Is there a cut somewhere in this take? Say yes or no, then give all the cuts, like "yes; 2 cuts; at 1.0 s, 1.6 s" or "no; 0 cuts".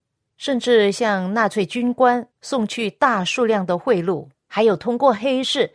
yes; 1 cut; at 4.3 s